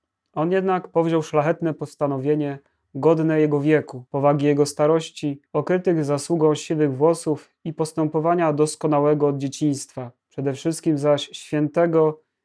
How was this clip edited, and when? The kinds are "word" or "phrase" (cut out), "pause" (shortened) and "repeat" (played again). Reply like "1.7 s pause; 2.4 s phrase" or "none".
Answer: 4.1 s pause; 5.5 s pause; 10.2 s pause